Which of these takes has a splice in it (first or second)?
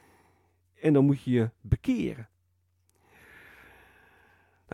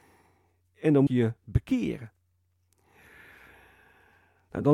second